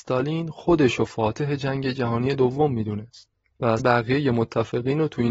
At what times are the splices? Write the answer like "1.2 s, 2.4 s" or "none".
3.8 s